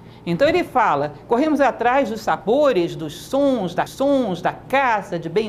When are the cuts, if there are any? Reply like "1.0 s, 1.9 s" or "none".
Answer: 3.9 s